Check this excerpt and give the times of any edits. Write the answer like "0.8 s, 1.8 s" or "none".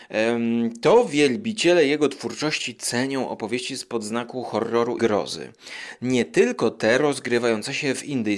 5.0 s

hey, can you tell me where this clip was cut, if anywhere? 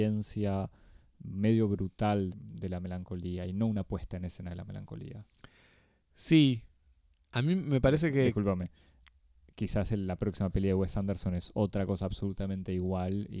2.3 s

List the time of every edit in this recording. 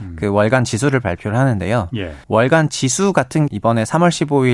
2.2 s, 3.5 s

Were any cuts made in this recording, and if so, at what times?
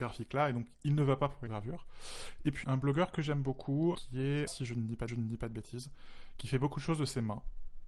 1.5 s, 2.6 s, 3.9 s, 4.5 s, 5.1 s

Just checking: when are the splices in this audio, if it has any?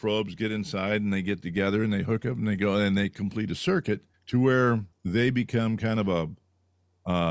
4.1 s, 4.9 s

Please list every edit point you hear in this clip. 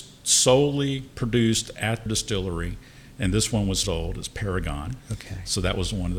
2.1 s, 3.8 s

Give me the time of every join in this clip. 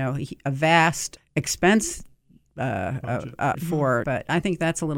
1.2 s, 3.5 s, 4.0 s

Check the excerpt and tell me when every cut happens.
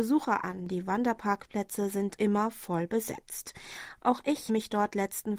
2.2 s, 4.5 s

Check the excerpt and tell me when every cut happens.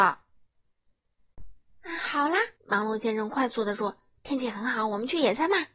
2.6 s

